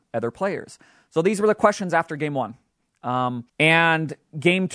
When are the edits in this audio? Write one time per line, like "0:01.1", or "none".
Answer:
0:03.5